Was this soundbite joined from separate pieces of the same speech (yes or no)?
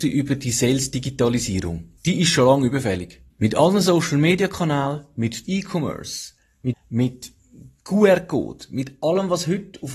yes